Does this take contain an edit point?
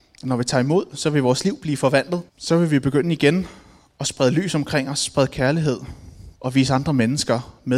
yes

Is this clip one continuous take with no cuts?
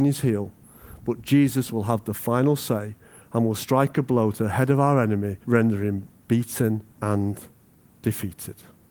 no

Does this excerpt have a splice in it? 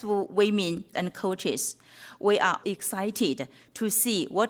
yes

